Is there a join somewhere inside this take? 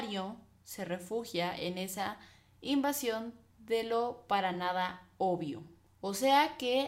no; 0 cuts

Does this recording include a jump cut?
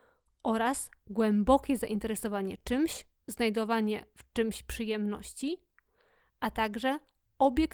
no; 0 cuts

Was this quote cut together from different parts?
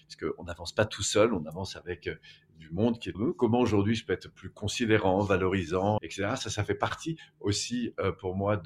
yes; 2 cuts; at 3.1 s, 6.0 s

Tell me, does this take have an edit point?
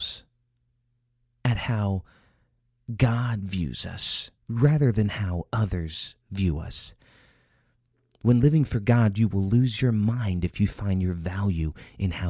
yes; 2 cuts; at 4.4 s, 6.2 s

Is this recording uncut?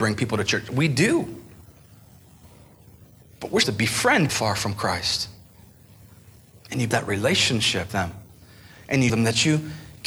no; 5 cuts; at 3.6 s, 4.3 s, 6.9 s, 7.9 s, 9.1 s

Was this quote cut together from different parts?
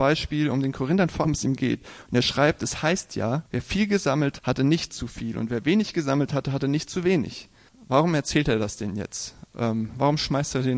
yes; 4 cuts; at 1.2 s, 3.5 s, 4.4 s, 7.7 s

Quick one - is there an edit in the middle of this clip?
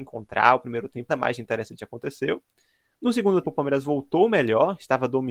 yes; 2 cuts; at 1.1 s, 3.4 s

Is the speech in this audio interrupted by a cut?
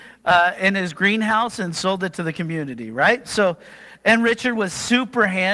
no; 0 cuts

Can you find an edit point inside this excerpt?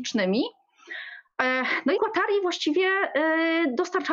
yes; 1 cut; at 2.0 s

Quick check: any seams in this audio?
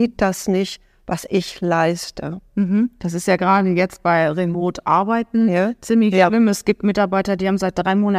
no; 0 cuts

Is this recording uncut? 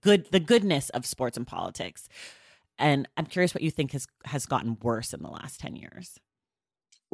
yes; 0 cuts

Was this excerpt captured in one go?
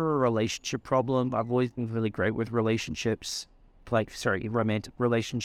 yes; 0 cuts

